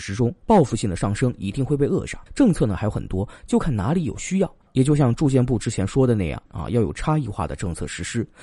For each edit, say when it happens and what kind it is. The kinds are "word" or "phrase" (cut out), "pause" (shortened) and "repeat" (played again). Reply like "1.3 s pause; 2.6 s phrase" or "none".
2.3 s pause